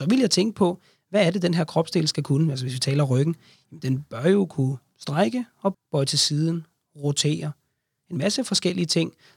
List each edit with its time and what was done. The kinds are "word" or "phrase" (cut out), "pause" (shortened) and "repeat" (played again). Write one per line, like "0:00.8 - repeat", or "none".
0:05.7 - word